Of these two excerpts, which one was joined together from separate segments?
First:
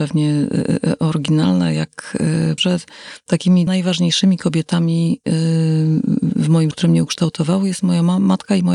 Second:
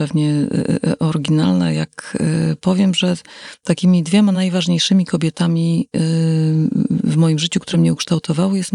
first; 3 cuts; at 2.6 s, 3.7 s, 6.7 s

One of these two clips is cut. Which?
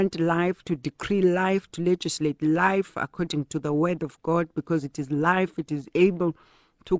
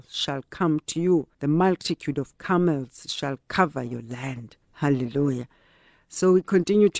second; 2 cuts; at 1.3 s, 4.6 s

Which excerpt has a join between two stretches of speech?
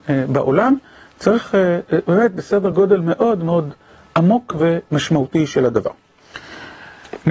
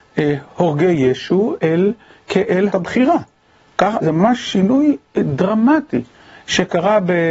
second; 3 cuts; at 1.6 s, 2.7 s, 4.0 s

